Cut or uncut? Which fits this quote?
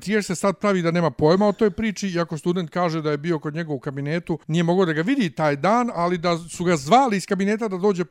cut